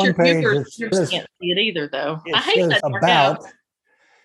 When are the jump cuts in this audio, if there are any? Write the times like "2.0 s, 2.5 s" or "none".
0.9 s, 2.8 s